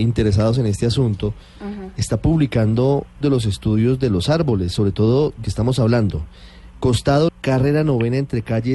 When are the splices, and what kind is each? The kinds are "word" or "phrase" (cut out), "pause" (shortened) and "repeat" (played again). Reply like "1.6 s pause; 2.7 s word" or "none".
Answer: 3.2 s word; 5.4 s word; 7.3 s word